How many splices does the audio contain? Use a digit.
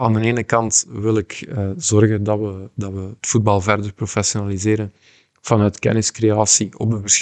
0